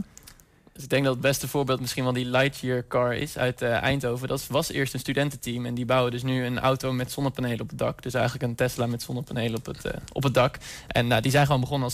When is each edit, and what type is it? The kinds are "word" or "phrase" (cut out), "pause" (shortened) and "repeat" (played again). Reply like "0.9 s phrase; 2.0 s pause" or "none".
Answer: none